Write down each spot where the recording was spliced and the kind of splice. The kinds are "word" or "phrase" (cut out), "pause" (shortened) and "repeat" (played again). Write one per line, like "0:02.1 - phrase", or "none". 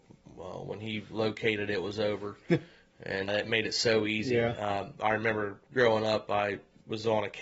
0:03.3 - word